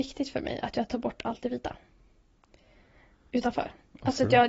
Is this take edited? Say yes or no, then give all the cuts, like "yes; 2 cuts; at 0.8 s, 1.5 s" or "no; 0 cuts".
no; 0 cuts